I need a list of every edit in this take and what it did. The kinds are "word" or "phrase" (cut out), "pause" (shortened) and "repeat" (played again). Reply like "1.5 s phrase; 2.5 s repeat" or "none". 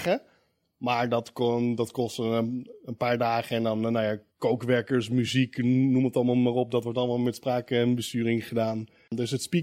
4.3 s pause